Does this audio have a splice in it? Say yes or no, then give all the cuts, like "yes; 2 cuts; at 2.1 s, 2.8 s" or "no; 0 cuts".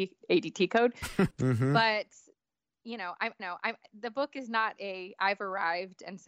yes; 2 cuts; at 1.3 s, 3.4 s